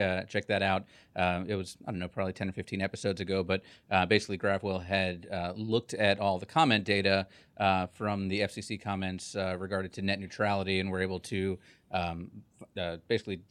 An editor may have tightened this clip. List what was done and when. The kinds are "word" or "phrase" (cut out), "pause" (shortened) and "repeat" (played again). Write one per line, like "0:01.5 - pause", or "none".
none